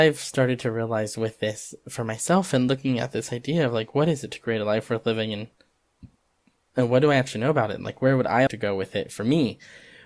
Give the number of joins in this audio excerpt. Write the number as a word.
one